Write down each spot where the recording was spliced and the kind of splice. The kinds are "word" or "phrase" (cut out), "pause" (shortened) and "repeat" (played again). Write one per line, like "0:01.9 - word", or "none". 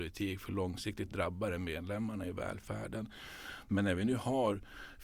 none